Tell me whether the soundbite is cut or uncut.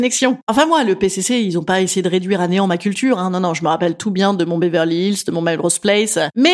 uncut